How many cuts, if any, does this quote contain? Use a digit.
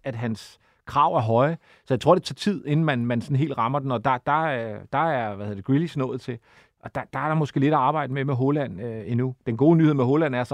0